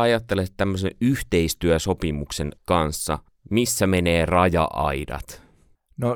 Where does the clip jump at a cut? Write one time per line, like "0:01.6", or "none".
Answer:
0:02.6